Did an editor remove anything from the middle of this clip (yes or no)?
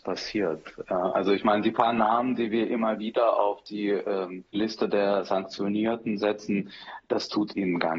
yes